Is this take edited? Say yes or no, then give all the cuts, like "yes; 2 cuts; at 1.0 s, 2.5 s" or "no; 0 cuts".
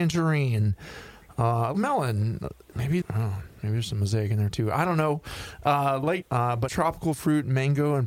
yes; 4 cuts; at 1.7 s, 3.0 s, 6.2 s, 6.7 s